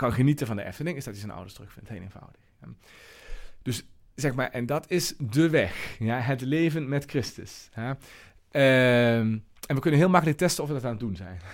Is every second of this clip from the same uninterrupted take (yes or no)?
yes